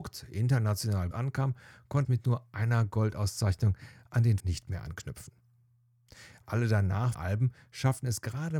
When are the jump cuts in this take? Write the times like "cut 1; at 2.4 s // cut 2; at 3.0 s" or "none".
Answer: cut 1; at 1.1 s // cut 2; at 2.0 s // cut 3; at 4.4 s // cut 4; at 7.1 s